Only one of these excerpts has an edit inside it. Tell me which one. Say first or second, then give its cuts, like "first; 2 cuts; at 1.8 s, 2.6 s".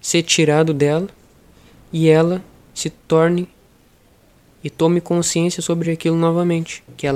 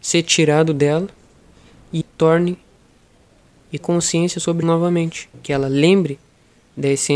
second; 3 cuts; at 2.0 s, 3.8 s, 4.6 s